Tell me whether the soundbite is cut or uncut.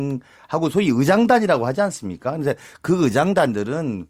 uncut